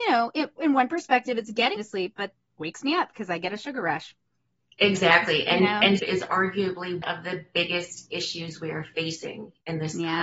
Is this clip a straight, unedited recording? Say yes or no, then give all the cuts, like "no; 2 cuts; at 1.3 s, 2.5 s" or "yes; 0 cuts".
no; 4 cuts; at 1.8 s, 2.5 s, 6.0 s, 7.0 s